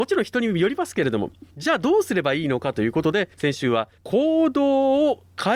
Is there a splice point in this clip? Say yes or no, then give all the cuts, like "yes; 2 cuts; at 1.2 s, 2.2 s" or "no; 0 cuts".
yes; 3 cuts; at 1.5 s, 3.3 s, 4.0 s